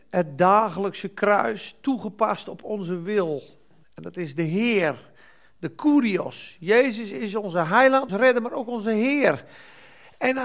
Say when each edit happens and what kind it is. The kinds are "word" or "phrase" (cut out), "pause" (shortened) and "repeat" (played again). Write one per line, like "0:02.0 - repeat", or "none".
0:03.8 - pause
0:08.1 - word

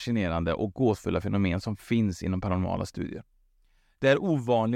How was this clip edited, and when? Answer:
none

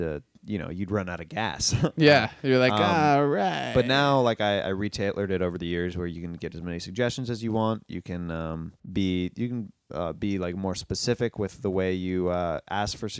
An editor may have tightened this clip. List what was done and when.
0:08.8 - pause

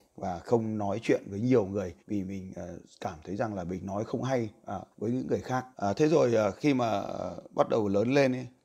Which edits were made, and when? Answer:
0:02.0 - pause
0:04.9 - pause
0:05.7 - pause

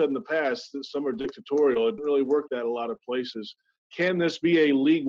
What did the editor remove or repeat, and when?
0:02.0 - word
0:02.5 - word

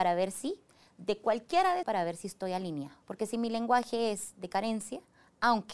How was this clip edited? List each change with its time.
0:01.8 - phrase
0:03.0 - pause

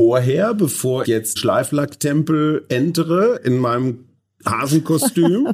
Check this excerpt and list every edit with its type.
0:01.0 - word
0:01.4 - word

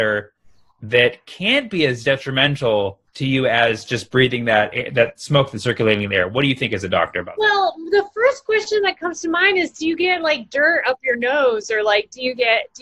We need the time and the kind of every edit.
0:03.1 - pause

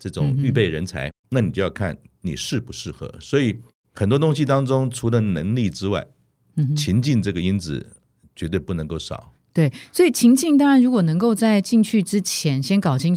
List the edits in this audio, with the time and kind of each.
0:01.1 - word

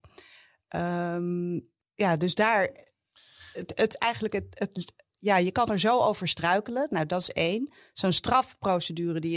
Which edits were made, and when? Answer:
0:01.8 - pause

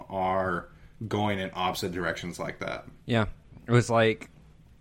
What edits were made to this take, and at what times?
0:03.0 - pause

